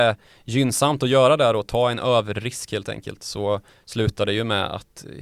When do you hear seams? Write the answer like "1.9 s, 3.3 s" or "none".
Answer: 3.7 s